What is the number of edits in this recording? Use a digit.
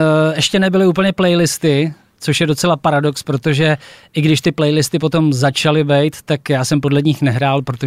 0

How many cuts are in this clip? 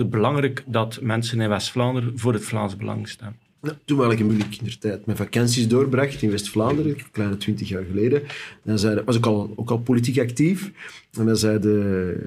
1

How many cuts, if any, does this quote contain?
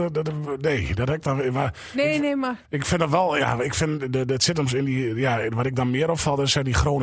2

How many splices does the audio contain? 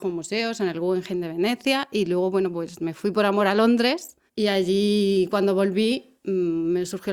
1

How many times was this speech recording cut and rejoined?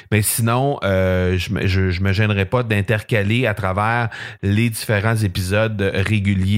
0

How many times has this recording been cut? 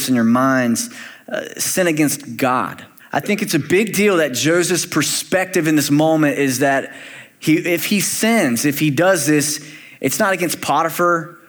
1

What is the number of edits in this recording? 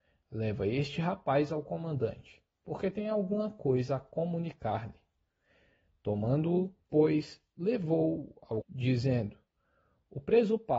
2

